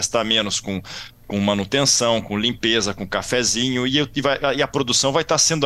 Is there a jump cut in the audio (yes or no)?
no